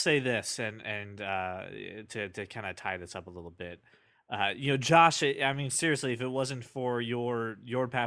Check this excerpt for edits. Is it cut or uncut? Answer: uncut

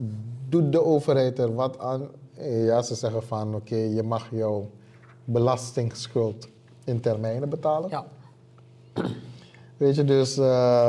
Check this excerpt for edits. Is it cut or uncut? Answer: uncut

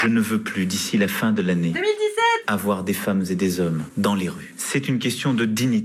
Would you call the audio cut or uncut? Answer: uncut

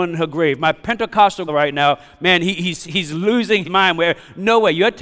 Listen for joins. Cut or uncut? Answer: cut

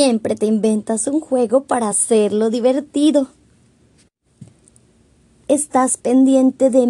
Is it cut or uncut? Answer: uncut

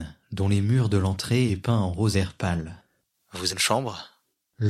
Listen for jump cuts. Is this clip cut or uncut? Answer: cut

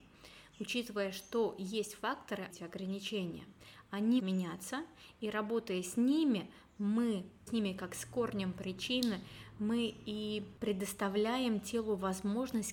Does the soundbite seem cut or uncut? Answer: cut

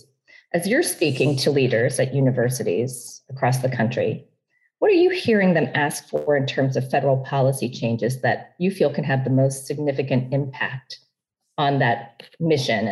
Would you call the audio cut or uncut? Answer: uncut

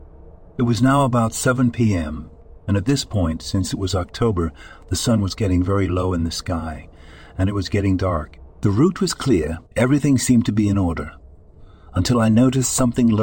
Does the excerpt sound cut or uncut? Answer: cut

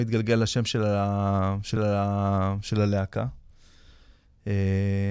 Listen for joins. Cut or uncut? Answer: cut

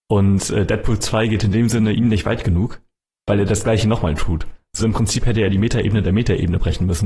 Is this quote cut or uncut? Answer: cut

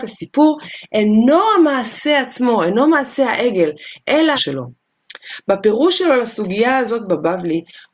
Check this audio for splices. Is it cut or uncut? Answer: cut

